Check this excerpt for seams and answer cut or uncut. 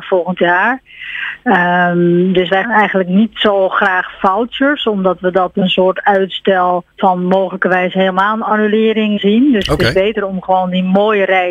cut